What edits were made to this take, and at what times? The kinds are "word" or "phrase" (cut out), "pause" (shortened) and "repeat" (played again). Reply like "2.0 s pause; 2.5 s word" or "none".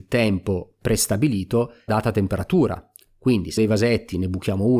1.9 s word; 3.6 s word